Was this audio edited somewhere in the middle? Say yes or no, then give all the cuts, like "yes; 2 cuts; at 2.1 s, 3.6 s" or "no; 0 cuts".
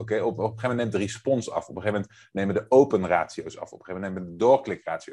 no; 0 cuts